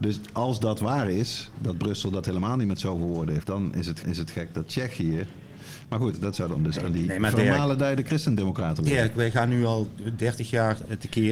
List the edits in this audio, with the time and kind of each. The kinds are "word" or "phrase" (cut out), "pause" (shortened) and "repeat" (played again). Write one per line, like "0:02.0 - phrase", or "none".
0:03.4 - word
0:04.0 - repeat